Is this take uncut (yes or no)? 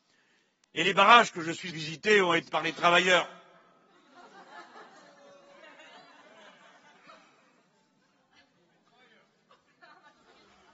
no